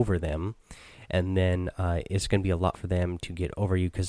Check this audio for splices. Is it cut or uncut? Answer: cut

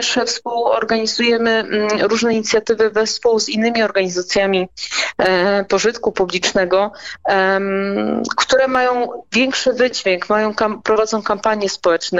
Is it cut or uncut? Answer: uncut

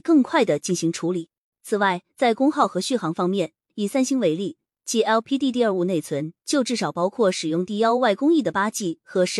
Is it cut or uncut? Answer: uncut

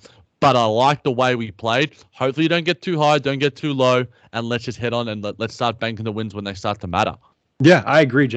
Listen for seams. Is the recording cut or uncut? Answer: uncut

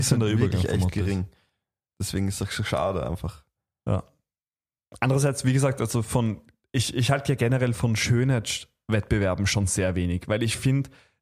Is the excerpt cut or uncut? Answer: uncut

